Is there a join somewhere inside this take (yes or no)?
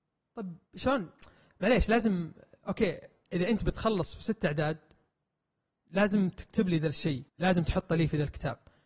yes